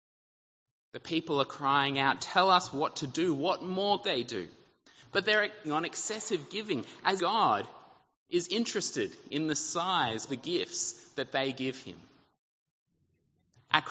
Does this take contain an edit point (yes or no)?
yes